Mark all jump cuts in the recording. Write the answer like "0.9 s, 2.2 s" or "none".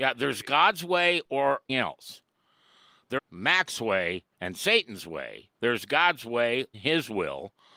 1.7 s, 3.2 s, 4.3 s, 5.6 s, 6.7 s